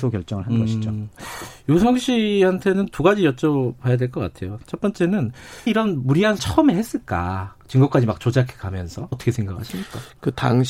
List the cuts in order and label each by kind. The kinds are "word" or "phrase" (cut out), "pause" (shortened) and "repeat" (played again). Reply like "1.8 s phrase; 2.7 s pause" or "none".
5.7 s word; 6.4 s word; 7.6 s pause; 9.1 s word